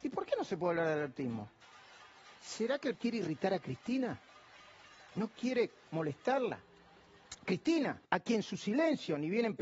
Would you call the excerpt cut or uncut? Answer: cut